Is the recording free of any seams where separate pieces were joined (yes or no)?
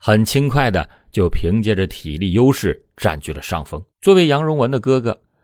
no